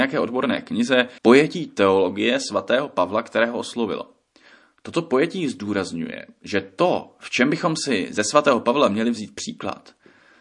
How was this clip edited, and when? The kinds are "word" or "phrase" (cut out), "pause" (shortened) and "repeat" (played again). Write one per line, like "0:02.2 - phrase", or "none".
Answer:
0:01.2 - pause

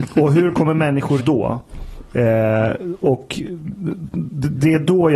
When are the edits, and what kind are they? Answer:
0:01.2 - word

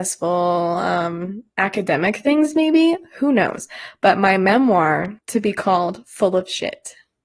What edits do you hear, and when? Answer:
0:01.5 - pause
0:05.2 - pause

